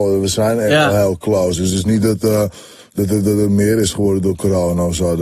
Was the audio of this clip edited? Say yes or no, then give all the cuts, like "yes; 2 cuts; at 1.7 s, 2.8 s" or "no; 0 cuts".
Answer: no; 0 cuts